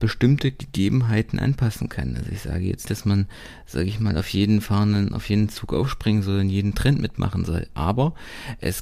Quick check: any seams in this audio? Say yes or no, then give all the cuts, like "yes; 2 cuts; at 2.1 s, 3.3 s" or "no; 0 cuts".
yes; 1 cut; at 2.8 s